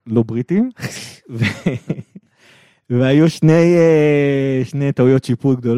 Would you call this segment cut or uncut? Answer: uncut